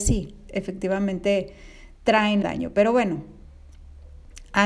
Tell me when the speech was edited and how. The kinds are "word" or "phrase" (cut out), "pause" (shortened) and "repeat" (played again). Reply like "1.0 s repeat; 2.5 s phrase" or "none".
2.4 s word